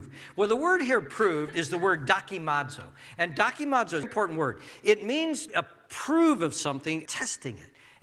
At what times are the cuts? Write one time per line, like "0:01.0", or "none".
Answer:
0:04.0
0:05.5
0:07.1